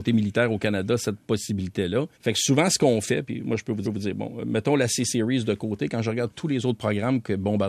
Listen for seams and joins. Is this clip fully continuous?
no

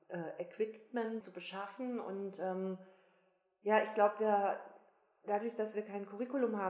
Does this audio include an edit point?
yes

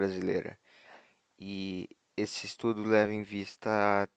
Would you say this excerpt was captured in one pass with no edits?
yes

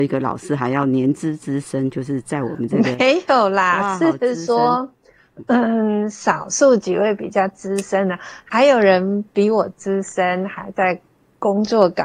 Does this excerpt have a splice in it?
no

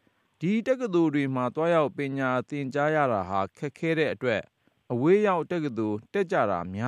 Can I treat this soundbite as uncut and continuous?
yes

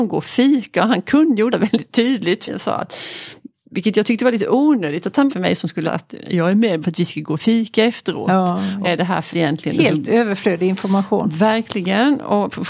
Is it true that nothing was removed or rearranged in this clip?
no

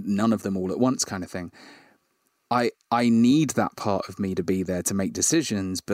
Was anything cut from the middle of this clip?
no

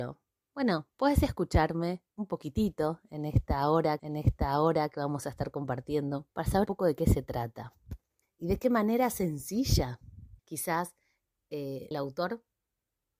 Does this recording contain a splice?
yes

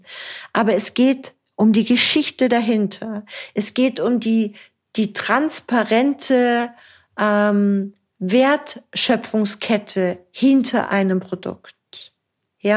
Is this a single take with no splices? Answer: yes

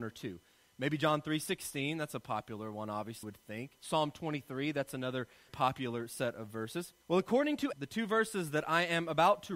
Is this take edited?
yes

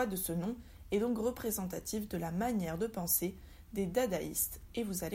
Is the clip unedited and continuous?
yes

